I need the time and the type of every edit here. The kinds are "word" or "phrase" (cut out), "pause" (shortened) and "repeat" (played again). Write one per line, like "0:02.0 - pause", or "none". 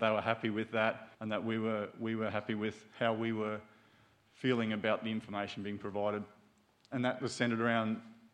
0:01.1 - pause